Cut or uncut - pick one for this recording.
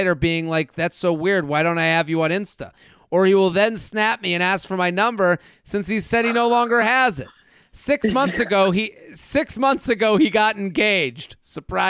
uncut